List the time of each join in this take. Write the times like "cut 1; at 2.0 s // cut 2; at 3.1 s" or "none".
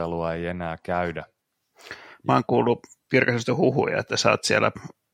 none